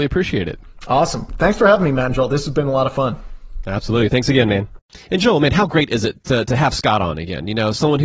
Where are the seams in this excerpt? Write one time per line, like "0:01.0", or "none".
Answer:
none